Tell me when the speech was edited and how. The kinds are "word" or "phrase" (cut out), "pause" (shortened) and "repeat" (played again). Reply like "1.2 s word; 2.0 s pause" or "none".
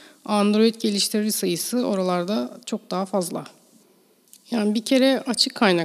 none